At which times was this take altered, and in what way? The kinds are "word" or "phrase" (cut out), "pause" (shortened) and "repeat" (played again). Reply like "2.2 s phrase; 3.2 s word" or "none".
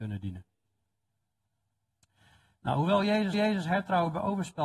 3.3 s repeat